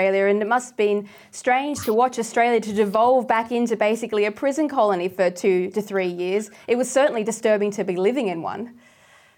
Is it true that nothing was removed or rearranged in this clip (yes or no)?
yes